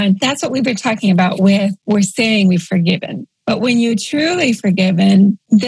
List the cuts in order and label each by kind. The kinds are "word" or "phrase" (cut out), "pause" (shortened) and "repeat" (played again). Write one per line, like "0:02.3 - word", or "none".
0:01.8 - pause